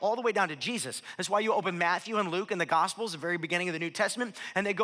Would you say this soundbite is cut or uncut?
uncut